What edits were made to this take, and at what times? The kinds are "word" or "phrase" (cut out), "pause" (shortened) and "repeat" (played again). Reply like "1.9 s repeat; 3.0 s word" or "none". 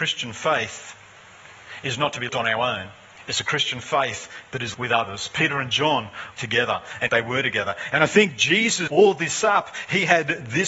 2.3 s word; 4.7 s word; 6.3 s word; 7.1 s word; 8.9 s word